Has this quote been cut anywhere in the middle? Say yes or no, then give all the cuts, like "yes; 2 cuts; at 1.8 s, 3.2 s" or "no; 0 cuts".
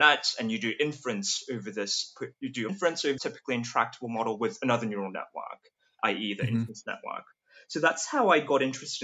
yes; 4 cuts; at 2.3 s, 2.7 s, 3.2 s, 6.0 s